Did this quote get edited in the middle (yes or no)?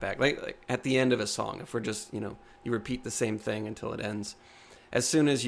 no